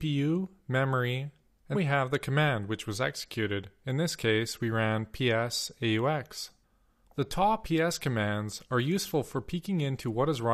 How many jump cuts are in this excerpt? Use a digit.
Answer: 2